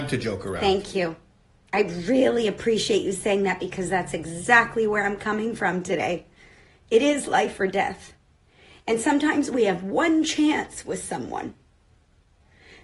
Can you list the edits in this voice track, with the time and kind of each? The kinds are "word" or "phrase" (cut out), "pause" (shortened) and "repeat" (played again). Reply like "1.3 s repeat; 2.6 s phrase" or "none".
none